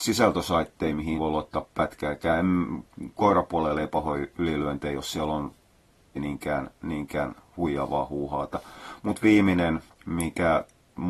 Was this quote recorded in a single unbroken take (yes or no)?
no